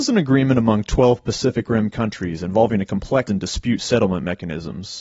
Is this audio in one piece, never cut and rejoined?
no; 1 cut; at 3.3 s

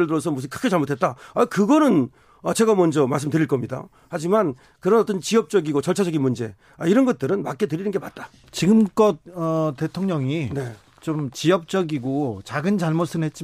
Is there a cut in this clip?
no; 0 cuts

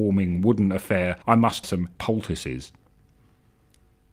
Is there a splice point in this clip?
yes; 3 cuts; at 1.2 s, 1.6 s, 2.0 s

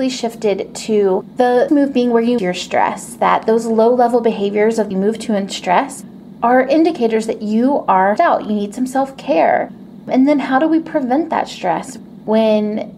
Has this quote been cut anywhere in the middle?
yes; 4 cuts; at 1.7 s, 2.4 s, 4.9 s, 8.2 s

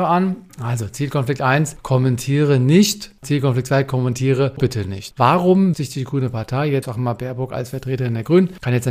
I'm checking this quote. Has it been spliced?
yes; 3 cuts; at 4.6 s, 5.7 s, 6.8 s

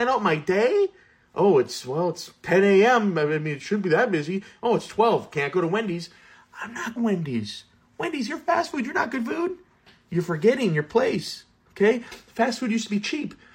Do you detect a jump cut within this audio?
yes; 1 cut; at 7.0 s

